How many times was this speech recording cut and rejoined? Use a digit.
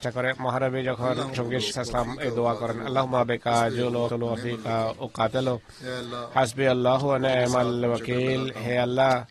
3